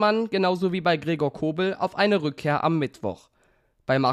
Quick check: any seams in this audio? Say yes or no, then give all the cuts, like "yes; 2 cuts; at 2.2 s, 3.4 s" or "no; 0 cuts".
no; 0 cuts